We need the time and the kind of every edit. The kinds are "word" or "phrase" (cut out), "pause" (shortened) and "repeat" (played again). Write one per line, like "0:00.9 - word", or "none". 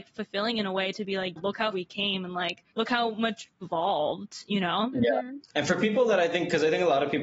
0:01.4 - word
0:01.7 - word
0:02.7 - pause
0:03.6 - word
0:05.4 - pause